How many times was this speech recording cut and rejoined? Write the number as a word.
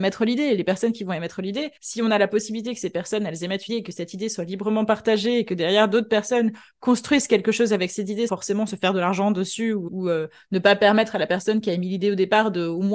four